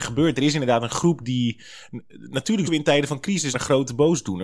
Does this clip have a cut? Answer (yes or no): yes